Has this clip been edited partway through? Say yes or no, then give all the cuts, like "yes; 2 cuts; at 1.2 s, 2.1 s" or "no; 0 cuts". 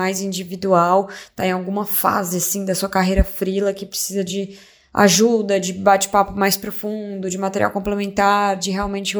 no; 0 cuts